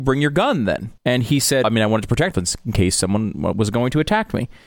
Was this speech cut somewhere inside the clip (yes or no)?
yes